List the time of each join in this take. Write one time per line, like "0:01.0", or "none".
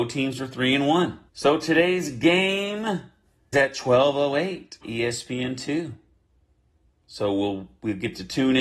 0:01.3
0:03.5
0:04.8